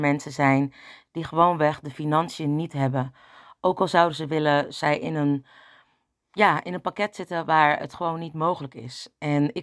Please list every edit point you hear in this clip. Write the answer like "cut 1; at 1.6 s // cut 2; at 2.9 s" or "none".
none